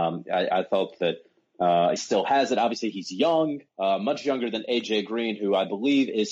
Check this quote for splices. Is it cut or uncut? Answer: cut